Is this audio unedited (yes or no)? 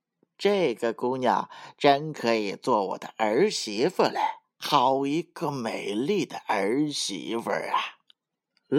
no